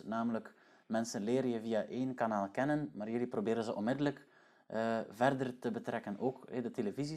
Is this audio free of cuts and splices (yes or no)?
yes